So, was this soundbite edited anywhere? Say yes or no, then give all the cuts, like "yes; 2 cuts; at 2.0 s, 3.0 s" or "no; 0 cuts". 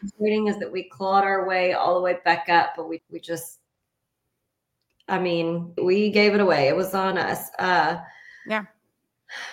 yes; 2 cuts; at 3.0 s, 5.8 s